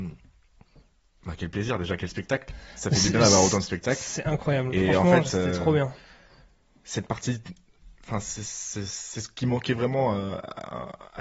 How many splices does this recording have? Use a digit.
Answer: 0